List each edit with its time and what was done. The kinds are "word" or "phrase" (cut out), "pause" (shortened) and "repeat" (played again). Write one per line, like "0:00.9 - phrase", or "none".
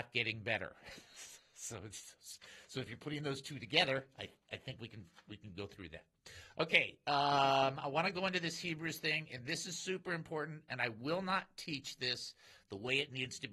none